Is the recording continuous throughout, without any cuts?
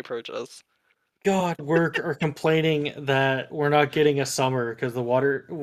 no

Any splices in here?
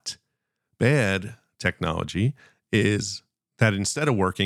no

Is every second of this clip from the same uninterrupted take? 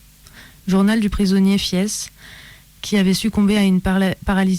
yes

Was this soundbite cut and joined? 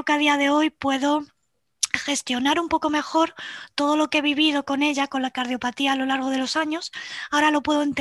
no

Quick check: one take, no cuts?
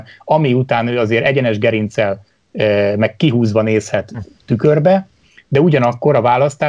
yes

